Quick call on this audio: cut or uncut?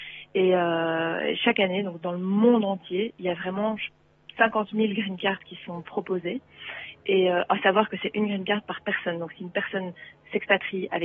uncut